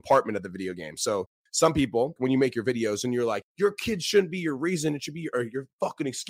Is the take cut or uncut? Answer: cut